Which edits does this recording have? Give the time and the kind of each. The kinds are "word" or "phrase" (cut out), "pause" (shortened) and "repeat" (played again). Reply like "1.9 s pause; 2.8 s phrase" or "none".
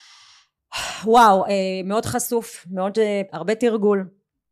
3.3 s phrase